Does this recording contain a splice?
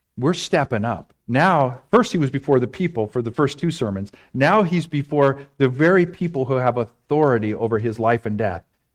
yes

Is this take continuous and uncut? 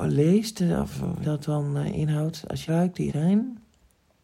no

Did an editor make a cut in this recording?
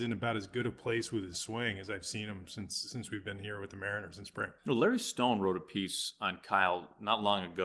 yes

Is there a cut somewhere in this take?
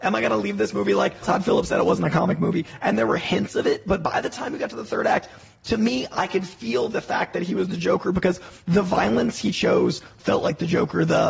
yes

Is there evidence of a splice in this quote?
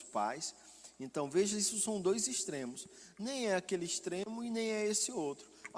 no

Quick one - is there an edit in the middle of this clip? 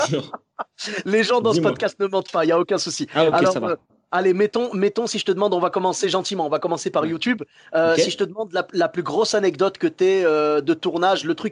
no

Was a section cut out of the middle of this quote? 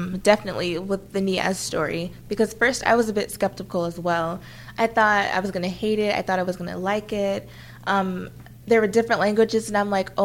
no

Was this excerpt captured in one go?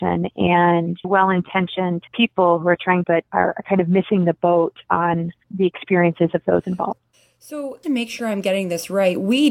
no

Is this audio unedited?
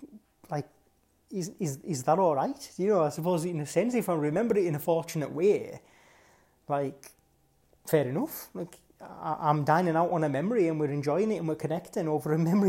yes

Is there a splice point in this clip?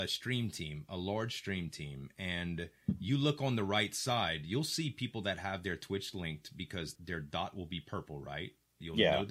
yes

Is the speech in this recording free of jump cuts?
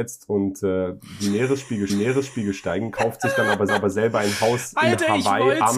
no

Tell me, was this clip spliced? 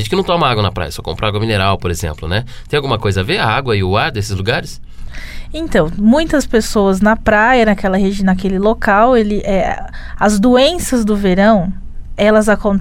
no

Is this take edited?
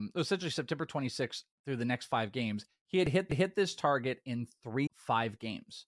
yes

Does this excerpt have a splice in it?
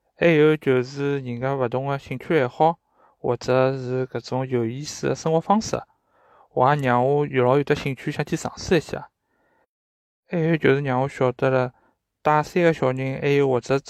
no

